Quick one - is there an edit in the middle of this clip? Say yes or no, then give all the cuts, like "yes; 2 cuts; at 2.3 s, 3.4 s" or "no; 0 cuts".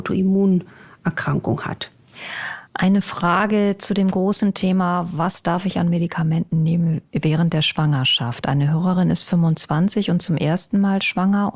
no; 0 cuts